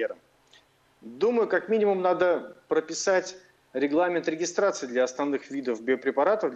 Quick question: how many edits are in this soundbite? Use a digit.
0